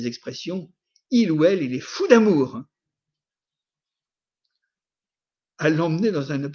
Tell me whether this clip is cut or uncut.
uncut